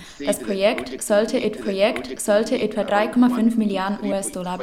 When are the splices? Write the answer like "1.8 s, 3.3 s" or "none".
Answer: 1.6 s